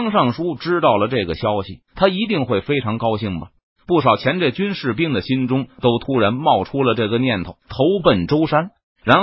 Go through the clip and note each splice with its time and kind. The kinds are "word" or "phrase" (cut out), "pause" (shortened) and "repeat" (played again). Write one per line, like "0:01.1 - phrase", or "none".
0:01.9 - pause
0:07.6 - pause